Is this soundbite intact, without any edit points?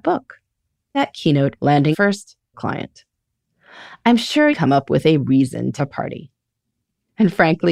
no; 6 cuts; at 0.9 s, 1.6 s, 1.9 s, 2.5 s, 4.5 s, 5.8 s

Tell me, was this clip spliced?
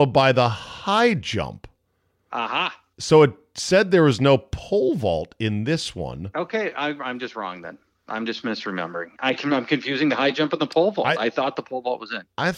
no; 0 cuts

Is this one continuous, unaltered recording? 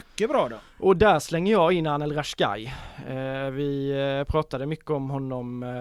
yes; 0 cuts

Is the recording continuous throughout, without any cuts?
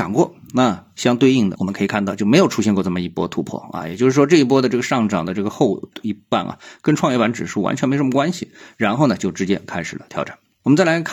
yes; 0 cuts

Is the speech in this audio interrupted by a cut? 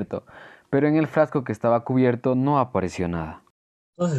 no; 0 cuts

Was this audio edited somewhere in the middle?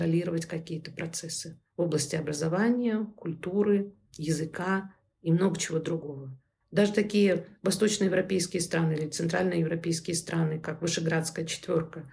yes; 1 cut; at 6.6 s

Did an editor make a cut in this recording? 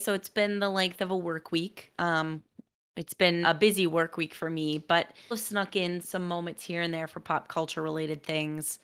yes; 3 cuts; at 3.4 s, 5.3 s, 6.0 s

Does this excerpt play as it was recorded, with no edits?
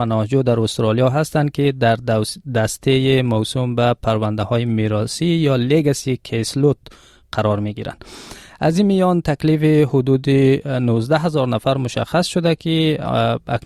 yes; 0 cuts

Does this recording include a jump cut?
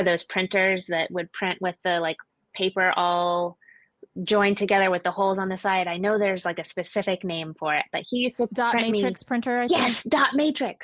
no; 0 cuts

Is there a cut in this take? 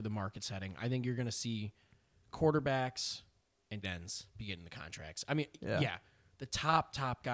yes; 1 cut; at 3.8 s

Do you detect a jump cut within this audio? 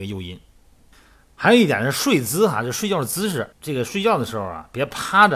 yes; 1 cut; at 3.5 s

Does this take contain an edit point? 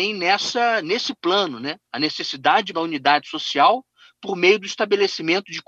yes; 2 cuts; at 1.9 s, 2.7 s

